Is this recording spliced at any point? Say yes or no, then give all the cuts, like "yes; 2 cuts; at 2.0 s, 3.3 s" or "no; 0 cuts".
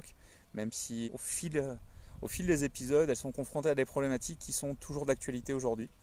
yes; 1 cut; at 1.1 s